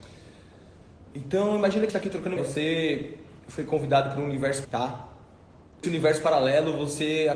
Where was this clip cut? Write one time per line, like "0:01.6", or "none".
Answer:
0:01.9
0:02.4
0:04.6
0:05.8